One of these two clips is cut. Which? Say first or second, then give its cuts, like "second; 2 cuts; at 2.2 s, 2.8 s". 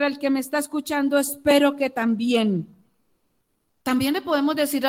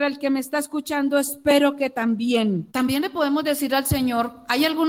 second; 1 cut; at 2.7 s